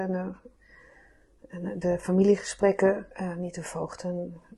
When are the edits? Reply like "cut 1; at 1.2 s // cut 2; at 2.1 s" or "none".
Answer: cut 1; at 1.8 s // cut 2; at 3.1 s